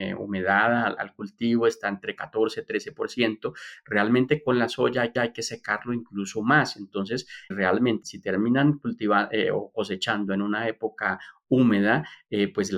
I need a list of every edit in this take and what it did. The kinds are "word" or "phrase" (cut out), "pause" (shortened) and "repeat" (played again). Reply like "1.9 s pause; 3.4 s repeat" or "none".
1.0 s word; 5.2 s repeat; 7.5 s word; 8.0 s word